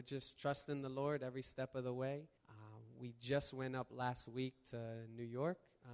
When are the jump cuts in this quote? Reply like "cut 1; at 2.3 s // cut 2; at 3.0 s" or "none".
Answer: cut 1; at 2.4 s

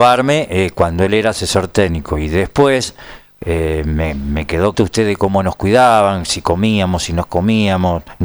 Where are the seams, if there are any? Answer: cut 1; at 4.7 s

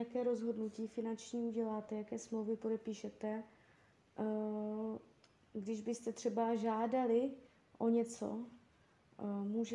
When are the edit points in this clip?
none

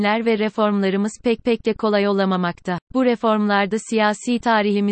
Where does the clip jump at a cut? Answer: cut 1; at 1.4 s // cut 2; at 2.8 s

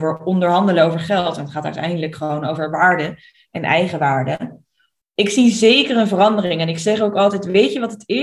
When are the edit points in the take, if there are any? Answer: none

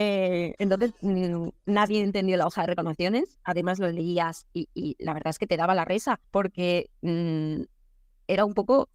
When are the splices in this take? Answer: cut 1; at 6.2 s

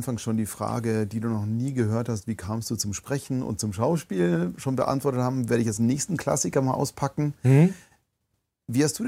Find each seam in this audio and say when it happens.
none

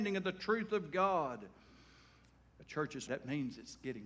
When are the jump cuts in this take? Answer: cut 1; at 3.1 s

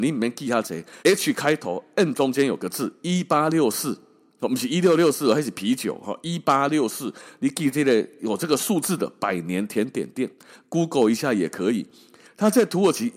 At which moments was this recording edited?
cut 1; at 1.0 s

